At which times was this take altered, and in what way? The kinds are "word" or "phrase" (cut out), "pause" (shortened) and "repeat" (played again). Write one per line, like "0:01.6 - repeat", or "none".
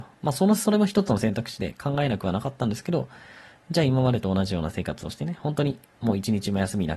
none